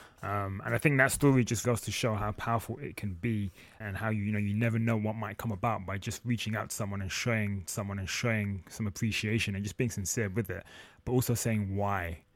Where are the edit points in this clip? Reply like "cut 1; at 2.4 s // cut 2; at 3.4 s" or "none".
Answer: cut 1; at 1.6 s // cut 2; at 3.8 s // cut 3; at 7.7 s